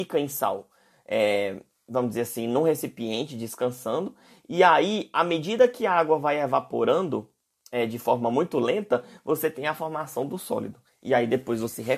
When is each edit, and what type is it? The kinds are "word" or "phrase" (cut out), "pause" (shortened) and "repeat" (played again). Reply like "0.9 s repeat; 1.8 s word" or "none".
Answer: none